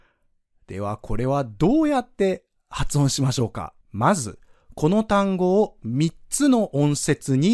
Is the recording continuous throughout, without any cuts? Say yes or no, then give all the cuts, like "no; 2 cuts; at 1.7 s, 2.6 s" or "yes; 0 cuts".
no; 1 cut; at 3.8 s